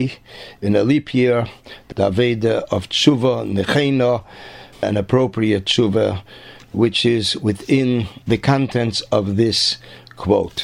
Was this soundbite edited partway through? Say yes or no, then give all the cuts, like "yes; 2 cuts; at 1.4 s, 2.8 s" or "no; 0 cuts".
yes; 3 cuts; at 1.9 s, 4.7 s, 8.2 s